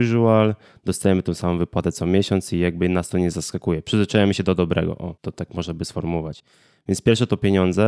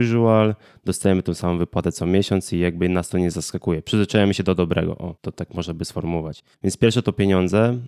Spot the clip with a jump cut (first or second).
second